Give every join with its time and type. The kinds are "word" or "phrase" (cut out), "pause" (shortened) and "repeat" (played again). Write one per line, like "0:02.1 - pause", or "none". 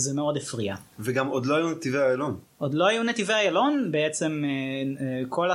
0:00.9 - pause